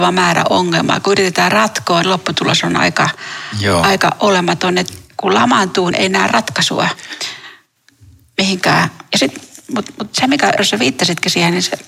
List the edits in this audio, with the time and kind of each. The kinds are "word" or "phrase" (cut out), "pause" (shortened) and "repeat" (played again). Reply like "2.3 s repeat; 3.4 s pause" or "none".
2.0 s word; 5.9 s word; 10.6 s word